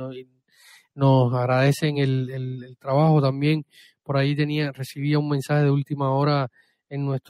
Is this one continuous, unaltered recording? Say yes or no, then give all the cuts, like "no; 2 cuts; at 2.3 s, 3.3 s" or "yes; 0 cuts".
yes; 0 cuts